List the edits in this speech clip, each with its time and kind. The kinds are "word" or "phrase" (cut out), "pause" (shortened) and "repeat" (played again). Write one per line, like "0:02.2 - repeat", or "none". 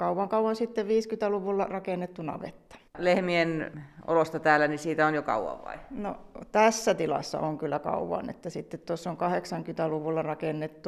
0:02.9 - pause

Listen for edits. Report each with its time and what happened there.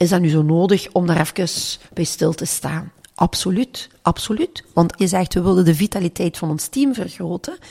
0:01.9 - pause
0:05.0 - word

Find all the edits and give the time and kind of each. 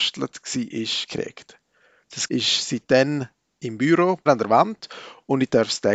0:01.1 - word
0:02.3 - word
0:04.3 - word

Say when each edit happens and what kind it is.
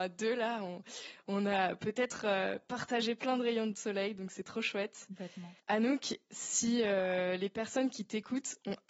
0:05.6 - pause

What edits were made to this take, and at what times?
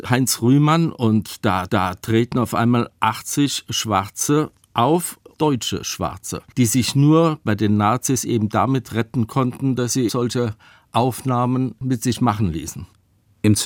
0:01.7 - repeat
0:06.5 - pause
0:10.1 - word

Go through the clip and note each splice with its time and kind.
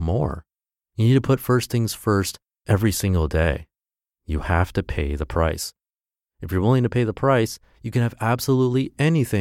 none

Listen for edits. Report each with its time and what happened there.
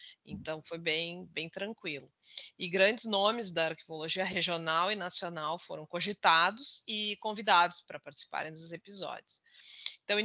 none

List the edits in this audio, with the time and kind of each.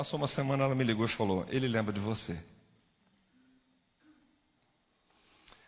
none

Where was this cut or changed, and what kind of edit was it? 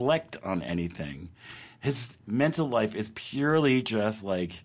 none

